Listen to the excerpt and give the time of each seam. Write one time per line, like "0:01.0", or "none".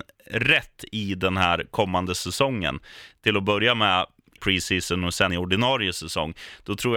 0:04.4
0:05.3